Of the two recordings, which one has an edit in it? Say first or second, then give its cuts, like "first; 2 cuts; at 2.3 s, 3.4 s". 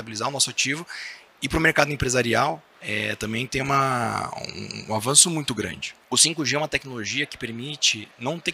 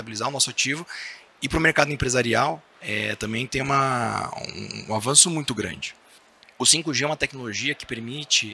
first; 1 cut; at 6.0 s